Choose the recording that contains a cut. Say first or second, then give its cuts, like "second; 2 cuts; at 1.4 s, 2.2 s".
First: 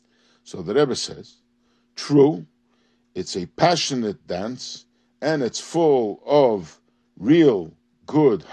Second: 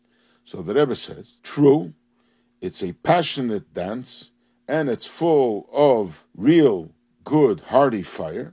second; 2 cuts; at 1.4 s, 6.3 s